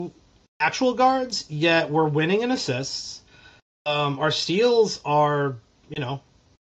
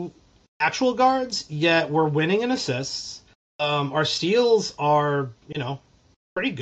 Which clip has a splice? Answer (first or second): second